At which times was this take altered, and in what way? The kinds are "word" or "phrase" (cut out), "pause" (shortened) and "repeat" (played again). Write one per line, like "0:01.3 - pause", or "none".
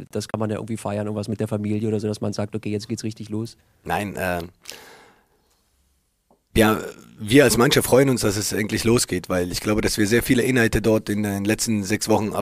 none